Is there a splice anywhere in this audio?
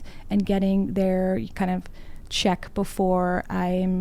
no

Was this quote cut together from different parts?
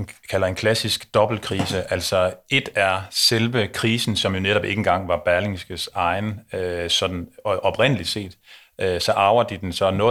no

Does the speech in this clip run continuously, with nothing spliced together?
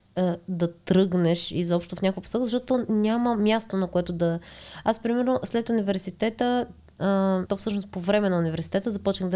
no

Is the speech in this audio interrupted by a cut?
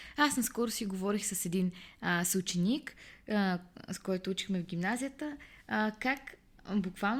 no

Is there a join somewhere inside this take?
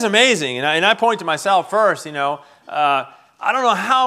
no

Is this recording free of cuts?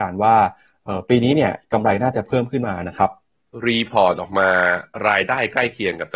yes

